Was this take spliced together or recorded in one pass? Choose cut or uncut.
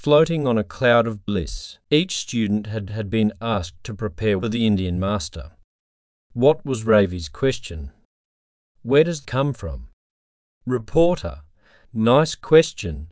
cut